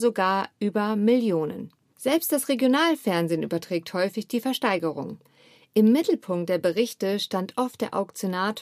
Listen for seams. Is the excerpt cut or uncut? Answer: uncut